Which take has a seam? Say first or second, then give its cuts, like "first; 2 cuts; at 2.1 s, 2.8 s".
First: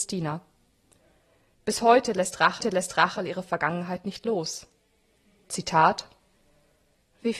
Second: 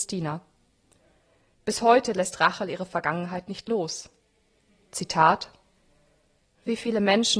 first; 1 cut; at 2.6 s